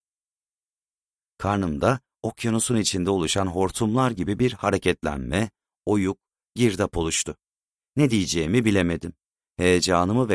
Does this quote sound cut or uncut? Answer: uncut